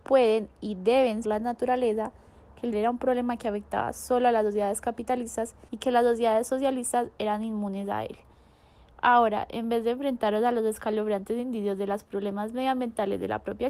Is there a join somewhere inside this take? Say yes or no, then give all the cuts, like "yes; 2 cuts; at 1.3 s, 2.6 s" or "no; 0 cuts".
yes; 3 cuts; at 1.2 s, 2.7 s, 5.7 s